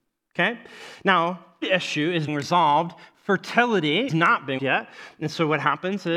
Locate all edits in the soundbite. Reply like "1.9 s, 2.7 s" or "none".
1.6 s, 2.3 s, 4.1 s, 4.6 s